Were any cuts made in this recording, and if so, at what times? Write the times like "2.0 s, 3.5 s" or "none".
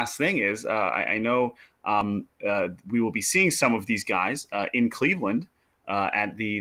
none